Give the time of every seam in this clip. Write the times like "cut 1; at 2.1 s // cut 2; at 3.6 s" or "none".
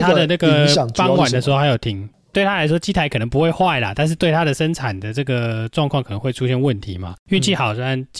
cut 1; at 7.2 s